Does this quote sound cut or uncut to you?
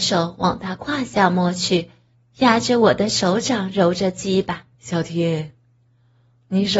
cut